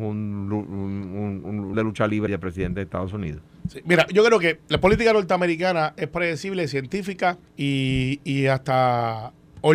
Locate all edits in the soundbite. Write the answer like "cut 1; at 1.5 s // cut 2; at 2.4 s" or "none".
cut 1; at 1.7 s // cut 2; at 2.3 s // cut 3; at 3.6 s // cut 4; at 4.1 s // cut 5; at 4.6 s // cut 6; at 7.5 s